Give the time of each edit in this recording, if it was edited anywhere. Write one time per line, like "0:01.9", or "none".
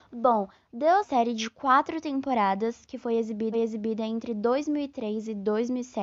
0:01.0
0:03.5